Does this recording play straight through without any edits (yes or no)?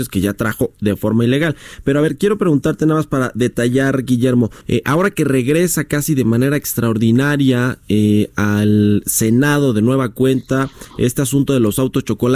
no